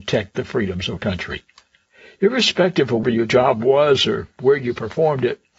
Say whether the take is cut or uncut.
cut